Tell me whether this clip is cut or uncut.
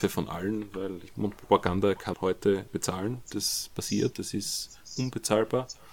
cut